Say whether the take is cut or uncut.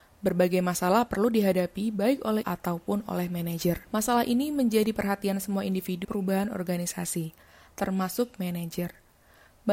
cut